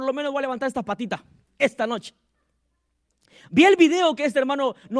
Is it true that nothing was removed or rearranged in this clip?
yes; 0 cuts

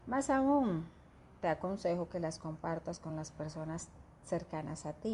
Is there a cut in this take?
no; 0 cuts

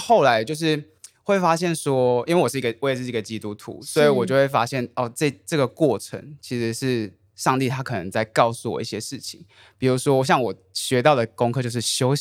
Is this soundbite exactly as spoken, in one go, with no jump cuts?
yes; 0 cuts

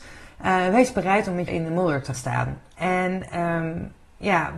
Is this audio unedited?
no; 2 cuts; at 1.5 s, 2.1 s

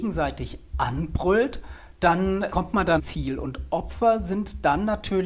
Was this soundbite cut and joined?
yes; 2 cuts; at 2.5 s, 3.0 s

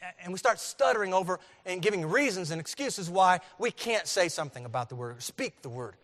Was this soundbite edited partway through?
no; 0 cuts

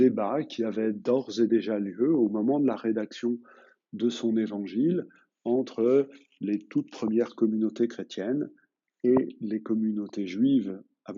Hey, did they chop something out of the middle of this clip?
no; 0 cuts

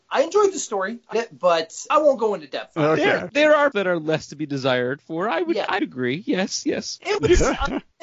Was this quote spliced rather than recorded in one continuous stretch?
yes; 5 cuts; at 1.1 s, 1.9 s, 3.3 s, 3.7 s, 5.8 s

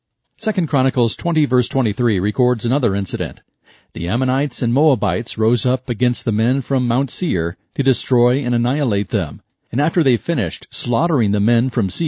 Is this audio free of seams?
yes; 0 cuts

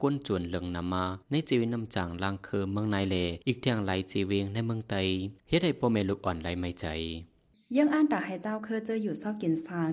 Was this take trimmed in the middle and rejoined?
yes; 3 cuts; at 1.2 s, 3.4 s, 5.4 s

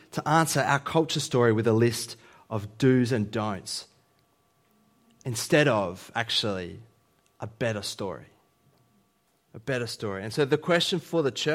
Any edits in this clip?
no; 0 cuts

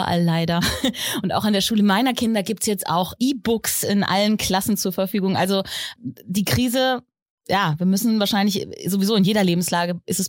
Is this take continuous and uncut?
yes; 0 cuts

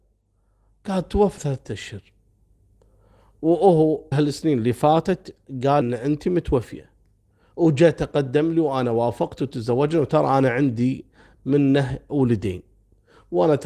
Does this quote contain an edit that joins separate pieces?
yes; 3 cuts; at 1.4 s, 4.1 s, 5.8 s

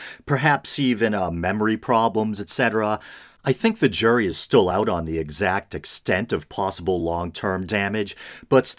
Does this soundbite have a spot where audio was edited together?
no; 0 cuts

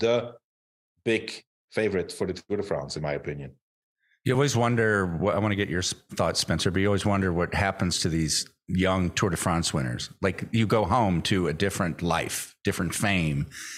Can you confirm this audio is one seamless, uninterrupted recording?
yes; 0 cuts

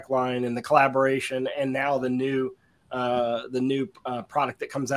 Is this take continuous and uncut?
yes; 0 cuts

